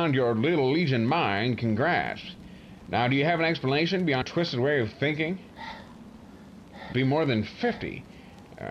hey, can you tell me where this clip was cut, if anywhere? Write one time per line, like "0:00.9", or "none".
0:04.2
0:06.9